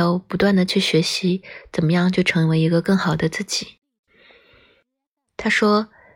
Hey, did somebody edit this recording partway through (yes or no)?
no